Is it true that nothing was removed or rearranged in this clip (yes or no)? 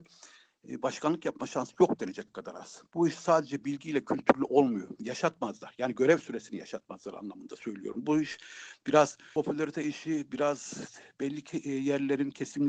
yes